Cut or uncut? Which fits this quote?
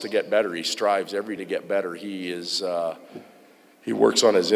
cut